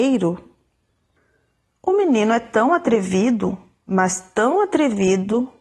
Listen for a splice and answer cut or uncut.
uncut